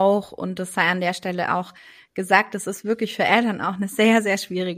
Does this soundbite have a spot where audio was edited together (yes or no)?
no